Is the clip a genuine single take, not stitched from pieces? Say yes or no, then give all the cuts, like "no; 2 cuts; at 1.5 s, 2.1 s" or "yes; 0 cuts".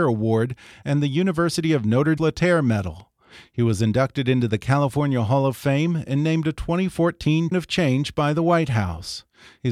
no; 2 cuts; at 2.2 s, 7.5 s